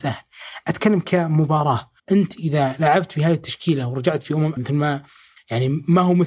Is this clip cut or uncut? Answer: cut